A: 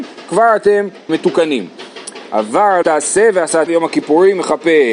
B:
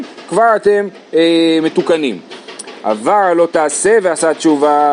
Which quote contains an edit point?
A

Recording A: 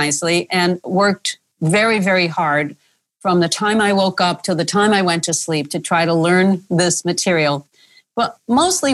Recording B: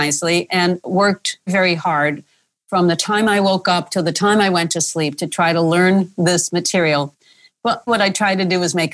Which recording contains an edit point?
B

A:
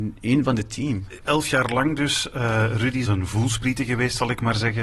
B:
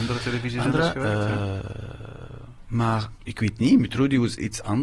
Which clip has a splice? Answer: A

